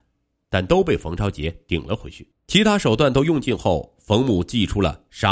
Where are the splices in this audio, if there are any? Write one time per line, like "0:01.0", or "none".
0:02.4